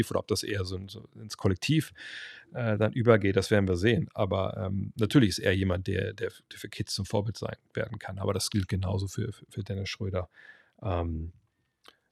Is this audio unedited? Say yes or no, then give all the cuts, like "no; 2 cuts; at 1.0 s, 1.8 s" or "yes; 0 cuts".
yes; 0 cuts